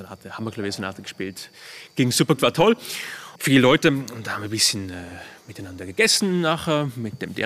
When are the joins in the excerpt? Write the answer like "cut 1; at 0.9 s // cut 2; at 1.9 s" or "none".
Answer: cut 1; at 2.4 s // cut 2; at 3.4 s

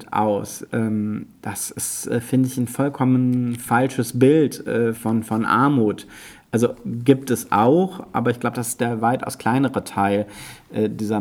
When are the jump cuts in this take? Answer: cut 1; at 5.0 s

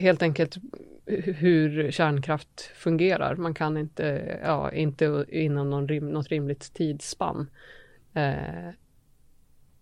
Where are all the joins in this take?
none

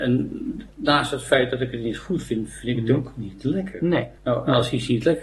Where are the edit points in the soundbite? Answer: cut 1; at 4.2 s

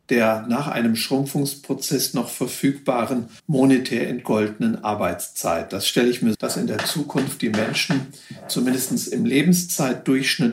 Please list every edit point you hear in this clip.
cut 1; at 3.4 s // cut 2; at 6.3 s

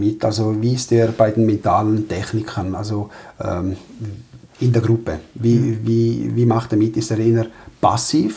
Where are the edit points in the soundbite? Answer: cut 1; at 4.4 s

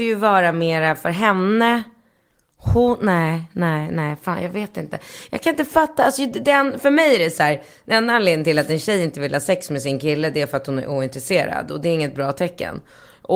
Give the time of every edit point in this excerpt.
none

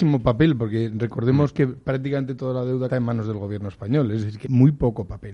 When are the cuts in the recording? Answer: cut 1; at 2.9 s // cut 2; at 4.4 s

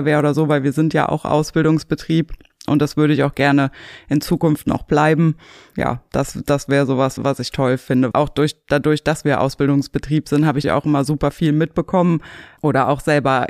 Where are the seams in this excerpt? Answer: cut 1; at 7.2 s // cut 2; at 8.1 s // cut 3; at 10.6 s

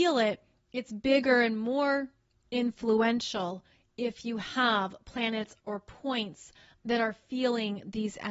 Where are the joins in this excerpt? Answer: none

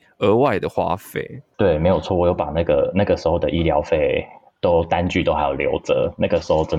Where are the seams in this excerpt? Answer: none

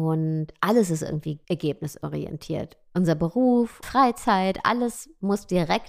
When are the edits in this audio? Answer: cut 1; at 1.4 s // cut 2; at 3.8 s

